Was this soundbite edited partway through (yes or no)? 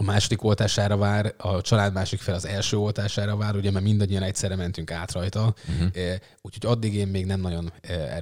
no